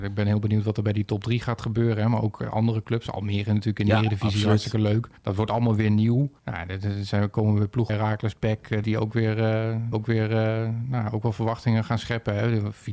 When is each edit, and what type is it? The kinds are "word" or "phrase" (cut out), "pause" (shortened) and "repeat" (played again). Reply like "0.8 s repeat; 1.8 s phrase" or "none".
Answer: 5.2 s pause; 6.4 s pause; 7.9 s word; 8.8 s word; 9.9 s repeat